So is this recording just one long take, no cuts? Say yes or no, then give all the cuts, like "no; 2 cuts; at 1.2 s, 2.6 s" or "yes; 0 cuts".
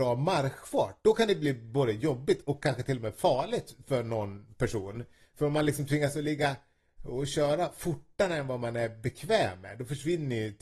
yes; 0 cuts